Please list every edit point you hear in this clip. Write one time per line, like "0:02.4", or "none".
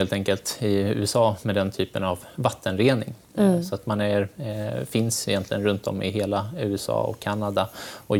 none